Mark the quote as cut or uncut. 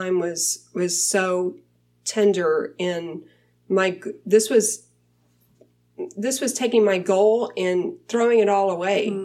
uncut